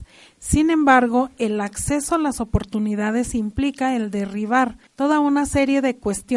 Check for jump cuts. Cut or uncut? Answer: cut